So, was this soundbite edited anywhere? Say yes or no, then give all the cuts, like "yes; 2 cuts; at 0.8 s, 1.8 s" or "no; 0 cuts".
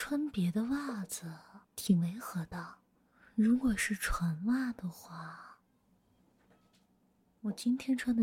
yes; 2 cuts; at 1.6 s, 3.0 s